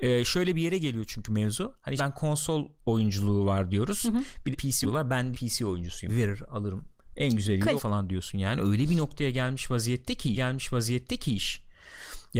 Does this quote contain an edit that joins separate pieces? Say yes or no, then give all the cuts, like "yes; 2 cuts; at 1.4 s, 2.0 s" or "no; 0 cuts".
yes; 8 cuts; at 2.0 s, 2.8 s, 4.5 s, 4.8 s, 5.3 s, 6.1 s, 7.8 s, 10.3 s